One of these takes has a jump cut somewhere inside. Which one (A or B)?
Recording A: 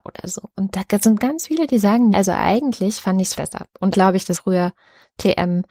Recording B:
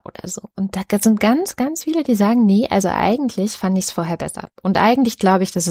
A